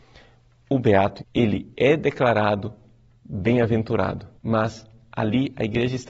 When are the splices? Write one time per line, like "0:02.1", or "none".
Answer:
0:01.2
0:04.4